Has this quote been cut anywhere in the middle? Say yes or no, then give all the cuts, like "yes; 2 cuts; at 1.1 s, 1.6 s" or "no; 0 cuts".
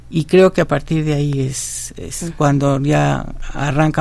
no; 0 cuts